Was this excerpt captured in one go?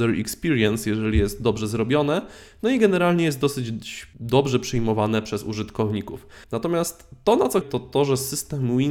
no; 3 cuts; at 4.1 s, 6.4 s, 7.6 s

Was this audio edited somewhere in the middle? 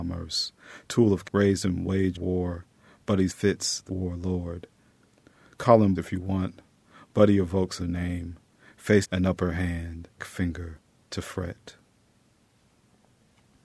yes; 8 cuts; at 1.2 s, 2.1 s, 3.3 s, 3.9 s, 6.0 s, 7.8 s, 9.0 s, 10.2 s

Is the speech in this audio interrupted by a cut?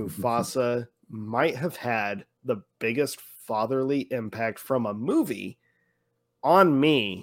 no; 0 cuts

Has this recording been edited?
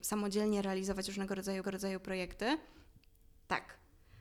yes; 1 cut; at 1.6 s

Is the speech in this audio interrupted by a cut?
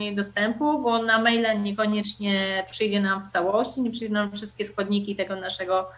no; 0 cuts

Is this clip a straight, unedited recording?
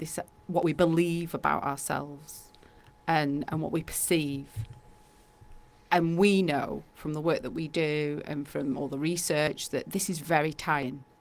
yes; 0 cuts

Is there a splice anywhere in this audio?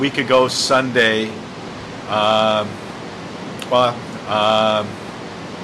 yes; 1 cut; at 4.2 s

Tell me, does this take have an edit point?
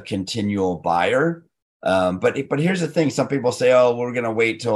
no; 0 cuts

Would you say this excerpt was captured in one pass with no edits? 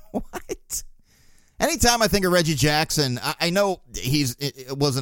yes; 0 cuts

